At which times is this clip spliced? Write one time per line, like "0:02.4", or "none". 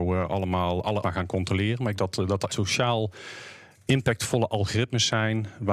0:01.0
0:02.0
0:02.5

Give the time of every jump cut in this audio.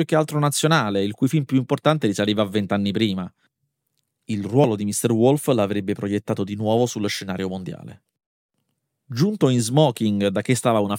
none

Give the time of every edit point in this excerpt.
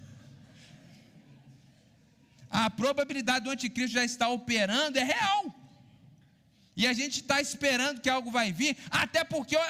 none

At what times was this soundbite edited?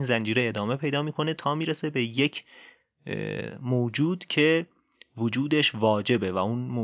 none

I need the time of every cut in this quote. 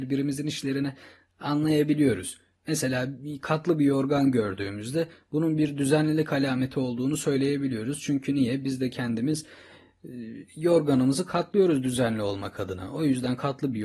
none

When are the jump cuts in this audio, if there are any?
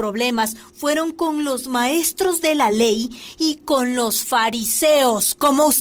none

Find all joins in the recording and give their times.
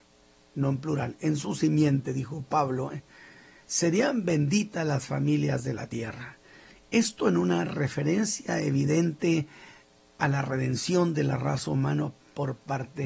none

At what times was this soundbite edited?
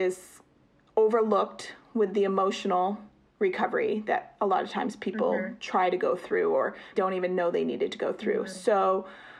0:03.3
0:06.9

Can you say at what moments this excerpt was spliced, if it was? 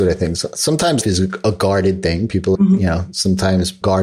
0:01.0
0:02.5

